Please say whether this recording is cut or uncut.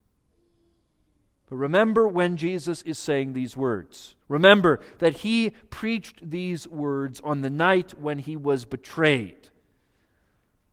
cut